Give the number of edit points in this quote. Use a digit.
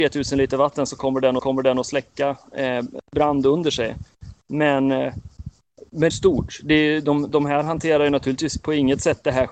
2